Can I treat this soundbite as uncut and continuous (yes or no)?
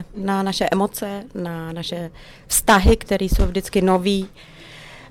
yes